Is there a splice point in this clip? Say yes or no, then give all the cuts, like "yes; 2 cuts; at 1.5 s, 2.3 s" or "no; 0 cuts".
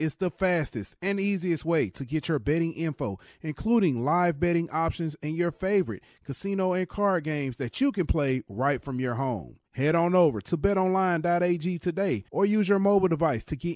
yes; 2 cuts; at 9.7 s, 12.3 s